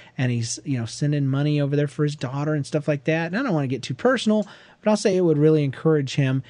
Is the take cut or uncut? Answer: uncut